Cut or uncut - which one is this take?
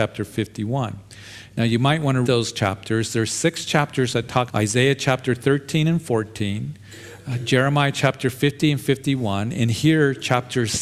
cut